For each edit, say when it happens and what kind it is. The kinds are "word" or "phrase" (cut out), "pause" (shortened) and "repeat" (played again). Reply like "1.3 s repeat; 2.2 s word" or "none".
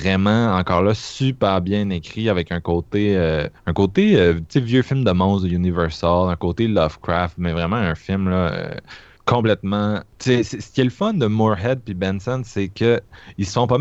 3.6 s pause; 9.2 s word